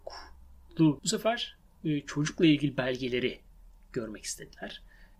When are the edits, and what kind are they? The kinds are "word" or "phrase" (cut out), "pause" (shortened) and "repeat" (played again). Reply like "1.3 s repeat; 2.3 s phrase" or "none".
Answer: 1.0 s phrase